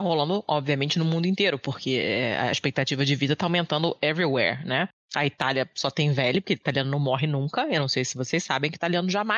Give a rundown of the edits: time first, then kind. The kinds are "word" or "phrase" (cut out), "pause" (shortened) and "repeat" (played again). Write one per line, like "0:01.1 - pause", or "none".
none